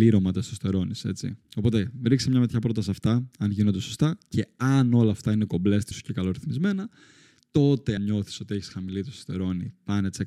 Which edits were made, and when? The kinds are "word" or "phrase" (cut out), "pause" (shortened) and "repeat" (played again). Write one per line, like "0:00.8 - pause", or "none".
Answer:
0:01.4 - pause
0:05.9 - word
0:08.0 - word